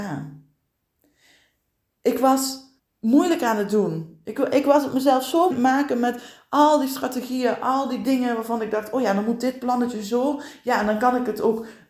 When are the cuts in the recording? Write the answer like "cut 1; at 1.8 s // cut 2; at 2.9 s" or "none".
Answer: cut 1; at 2.8 s // cut 2; at 5.5 s